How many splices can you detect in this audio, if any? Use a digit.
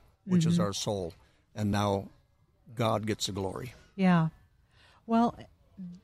0